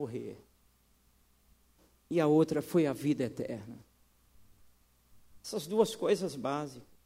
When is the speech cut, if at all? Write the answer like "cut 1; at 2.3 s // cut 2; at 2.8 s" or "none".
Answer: cut 1; at 5.4 s